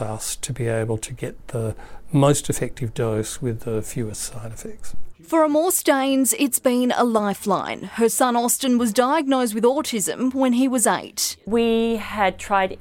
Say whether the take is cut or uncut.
uncut